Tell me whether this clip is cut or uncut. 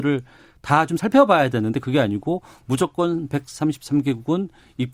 uncut